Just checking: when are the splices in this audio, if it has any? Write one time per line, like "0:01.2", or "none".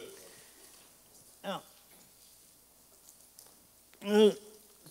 none